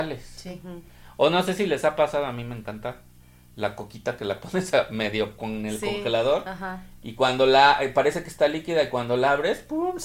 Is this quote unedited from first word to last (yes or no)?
yes